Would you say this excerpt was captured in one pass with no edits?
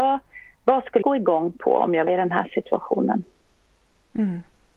no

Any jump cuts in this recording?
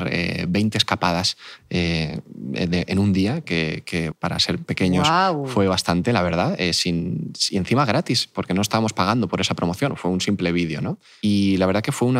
yes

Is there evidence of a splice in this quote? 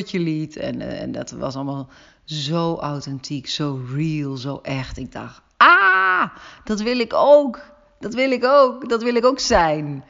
no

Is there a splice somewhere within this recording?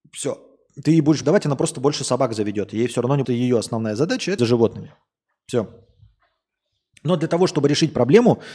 yes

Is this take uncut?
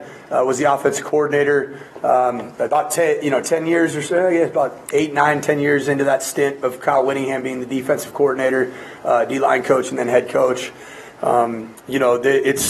no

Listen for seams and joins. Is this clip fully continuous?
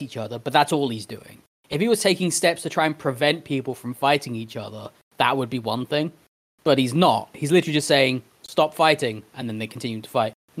yes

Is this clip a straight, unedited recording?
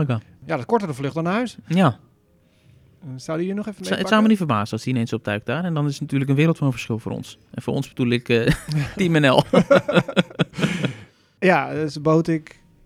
no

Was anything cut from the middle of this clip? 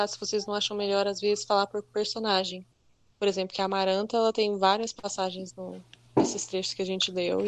no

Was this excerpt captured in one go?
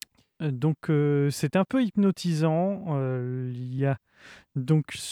yes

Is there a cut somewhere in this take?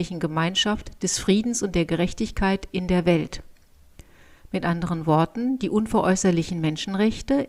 no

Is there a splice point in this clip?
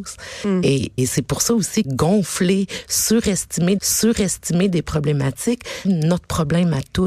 yes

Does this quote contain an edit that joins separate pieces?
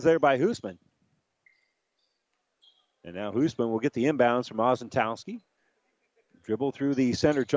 no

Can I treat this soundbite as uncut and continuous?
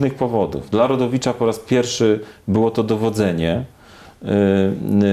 yes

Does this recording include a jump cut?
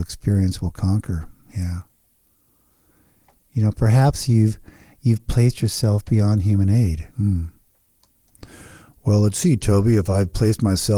yes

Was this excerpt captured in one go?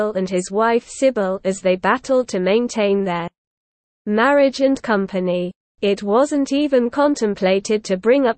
yes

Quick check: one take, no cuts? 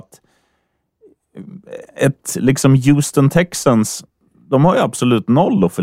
yes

